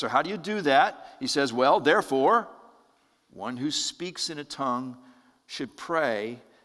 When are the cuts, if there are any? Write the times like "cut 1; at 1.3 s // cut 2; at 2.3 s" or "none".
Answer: none